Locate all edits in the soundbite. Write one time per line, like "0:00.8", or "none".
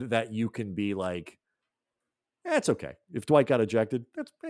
none